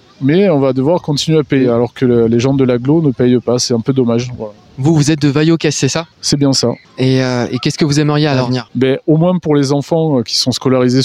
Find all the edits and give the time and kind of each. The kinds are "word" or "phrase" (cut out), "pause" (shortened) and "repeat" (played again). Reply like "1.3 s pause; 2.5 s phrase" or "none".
6.1 s pause

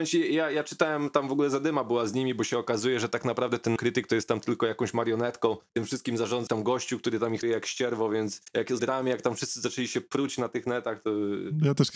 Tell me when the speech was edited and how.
3.8 s word; 6.5 s word; 7.4 s word; 8.8 s phrase

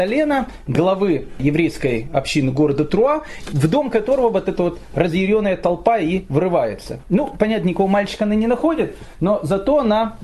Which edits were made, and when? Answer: none

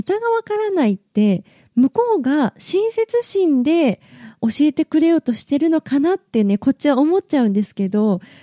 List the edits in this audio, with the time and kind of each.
none

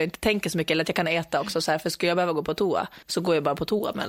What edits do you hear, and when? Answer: 3.0 s pause

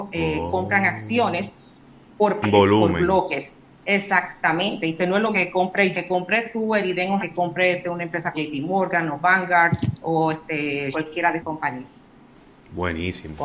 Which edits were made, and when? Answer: 2.4 s word; 5.3 s word; 5.9 s word; 7.2 s word; 8.3 s word; 10.9 s word; 11.4 s word

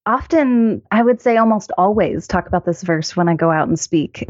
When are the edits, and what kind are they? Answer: none

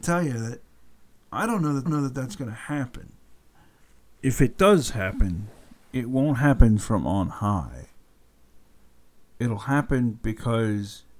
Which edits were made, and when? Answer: 1.9 s repeat

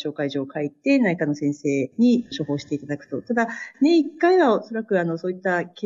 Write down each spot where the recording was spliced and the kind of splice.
none

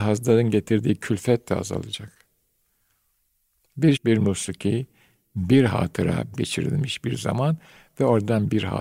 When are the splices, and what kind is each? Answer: 4.0 s word; 6.3 s word

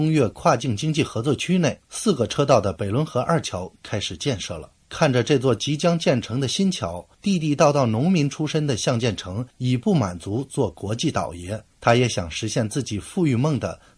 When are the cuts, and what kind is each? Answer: none

